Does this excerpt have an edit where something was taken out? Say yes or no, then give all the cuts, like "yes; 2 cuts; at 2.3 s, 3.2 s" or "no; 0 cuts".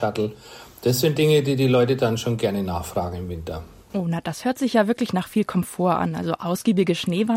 no; 0 cuts